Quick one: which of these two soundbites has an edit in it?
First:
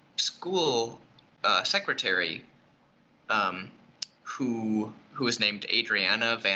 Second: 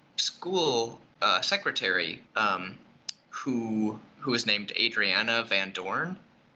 second; 2 cuts; at 1.1 s, 2.3 s

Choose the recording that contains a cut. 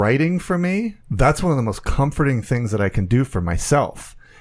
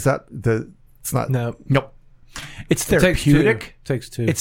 first; 1 cut; at 1.0 s

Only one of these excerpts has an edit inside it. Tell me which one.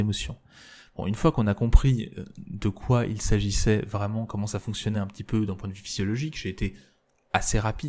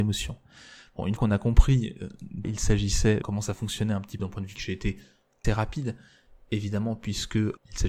second; 6 cuts; at 1.2 s, 2.4 s, 3.2 s, 4.2 s, 4.6 s, 5.4 s

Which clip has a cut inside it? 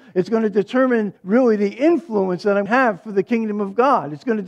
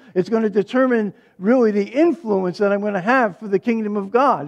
first; 2 cuts; at 1.2 s, 2.7 s

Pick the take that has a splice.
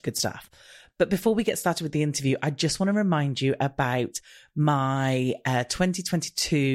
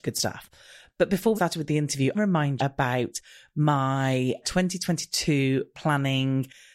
second; 4 cuts; at 1.4 s, 2.1 s, 2.6 s, 4.4 s

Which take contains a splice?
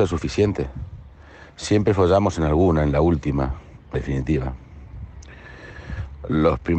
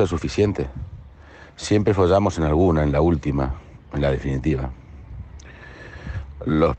first; 1 cut; at 3.9 s

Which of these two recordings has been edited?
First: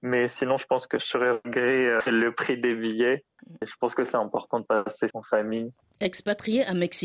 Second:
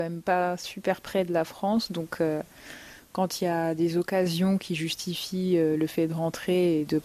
first; 1 cut; at 5.1 s

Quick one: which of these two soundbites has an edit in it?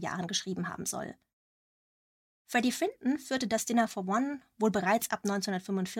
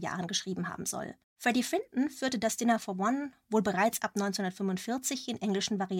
second; 1 cut; at 1.2 s

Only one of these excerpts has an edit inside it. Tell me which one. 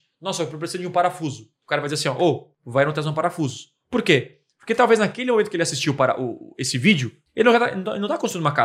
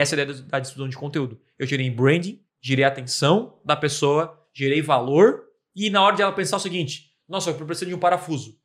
second; 1 cut; at 2.5 s

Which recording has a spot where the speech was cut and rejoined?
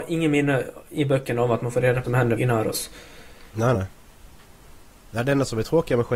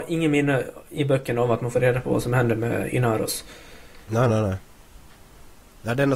first; 3 cuts; at 2.0 s, 2.4 s, 3.7 s

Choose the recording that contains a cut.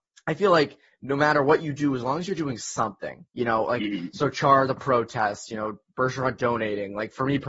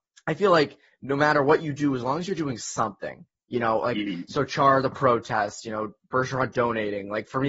first; 1 cut; at 3.3 s

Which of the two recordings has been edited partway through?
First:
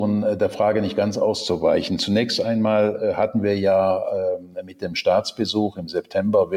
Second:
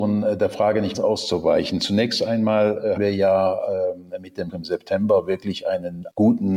second; 3 cuts; at 0.9 s, 3.0 s, 4.5 s

